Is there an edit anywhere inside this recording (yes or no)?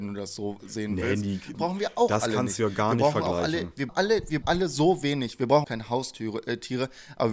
yes